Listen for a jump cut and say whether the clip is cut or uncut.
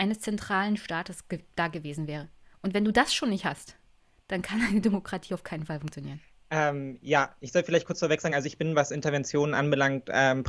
uncut